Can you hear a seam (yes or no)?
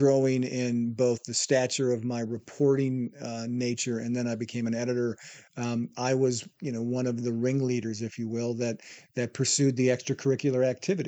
no